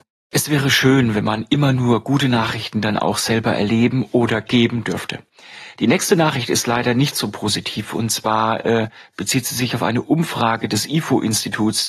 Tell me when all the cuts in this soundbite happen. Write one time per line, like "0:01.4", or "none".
none